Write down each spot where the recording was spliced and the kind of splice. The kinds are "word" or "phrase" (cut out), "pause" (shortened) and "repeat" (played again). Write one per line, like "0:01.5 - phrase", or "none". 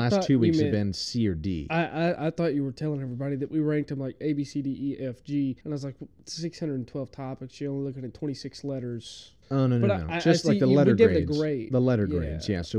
0:05.6 - pause
0:09.4 - pause